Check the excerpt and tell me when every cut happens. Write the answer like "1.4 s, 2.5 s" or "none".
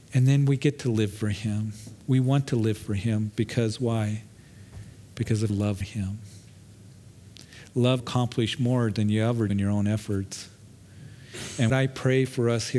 5.5 s, 5.8 s, 8.0 s, 9.5 s, 11.7 s